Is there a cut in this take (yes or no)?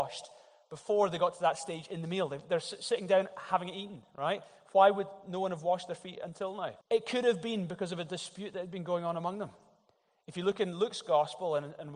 yes